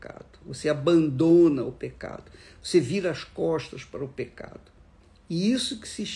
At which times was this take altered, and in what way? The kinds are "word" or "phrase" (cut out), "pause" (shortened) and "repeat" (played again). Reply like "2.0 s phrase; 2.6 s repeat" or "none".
none